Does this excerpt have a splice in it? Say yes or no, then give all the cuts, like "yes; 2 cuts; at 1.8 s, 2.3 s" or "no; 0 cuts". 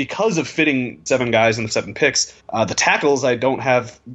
yes; 3 cuts; at 1.1 s, 1.7 s, 2.4 s